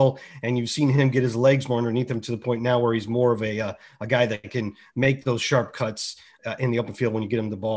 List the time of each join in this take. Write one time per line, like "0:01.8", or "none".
none